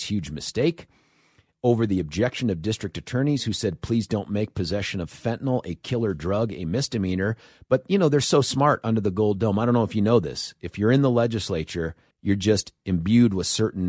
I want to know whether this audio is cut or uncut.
cut